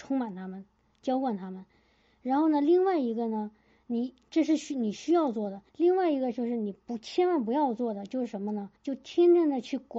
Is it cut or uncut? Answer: cut